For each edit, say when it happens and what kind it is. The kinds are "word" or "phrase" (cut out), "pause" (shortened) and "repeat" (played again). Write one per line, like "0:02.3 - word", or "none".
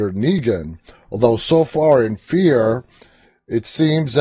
none